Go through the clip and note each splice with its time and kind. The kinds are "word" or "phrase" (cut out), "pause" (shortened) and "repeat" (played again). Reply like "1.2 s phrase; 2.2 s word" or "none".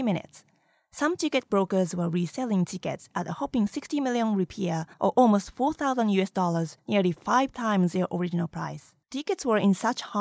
4.9 s pause; 6.8 s pause; 9.0 s pause

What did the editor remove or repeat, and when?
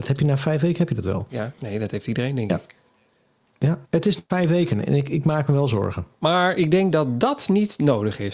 3.8 s pause; 6.1 s pause

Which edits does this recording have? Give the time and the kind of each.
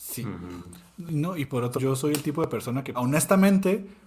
1.8 s word; 2.9 s word

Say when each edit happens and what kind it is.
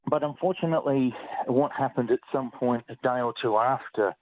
none

